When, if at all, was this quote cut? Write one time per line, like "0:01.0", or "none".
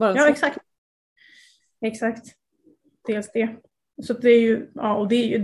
none

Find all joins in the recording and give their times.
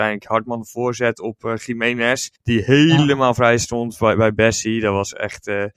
0:02.4

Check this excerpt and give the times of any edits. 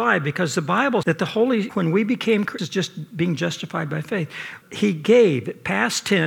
0:01.0
0:01.7
0:02.6
0:04.6

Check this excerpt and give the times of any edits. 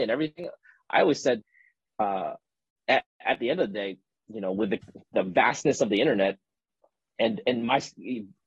none

